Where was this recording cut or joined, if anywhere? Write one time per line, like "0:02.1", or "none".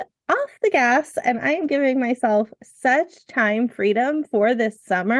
none

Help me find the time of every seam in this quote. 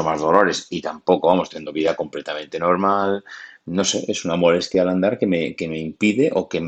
none

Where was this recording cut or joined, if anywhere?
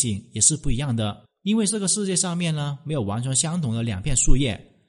0:01.3

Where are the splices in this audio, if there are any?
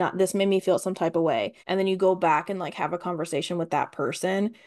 0:01.6

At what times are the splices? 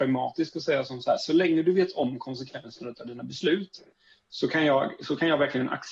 none

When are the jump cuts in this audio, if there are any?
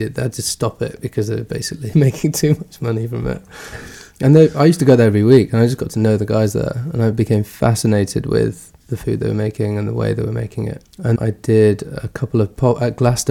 0:01.9
0:08.8
0:11.2

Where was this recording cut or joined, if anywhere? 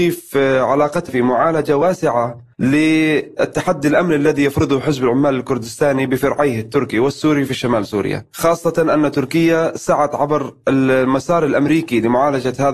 0:01.1
0:02.5

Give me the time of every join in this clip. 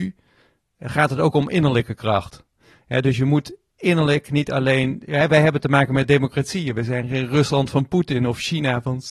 none

